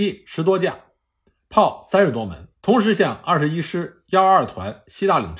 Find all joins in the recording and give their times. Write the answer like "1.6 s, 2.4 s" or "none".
2.5 s